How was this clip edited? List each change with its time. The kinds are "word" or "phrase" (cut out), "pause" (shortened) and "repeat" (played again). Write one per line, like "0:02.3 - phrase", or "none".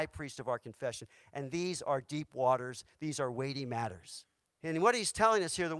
0:04.5 - pause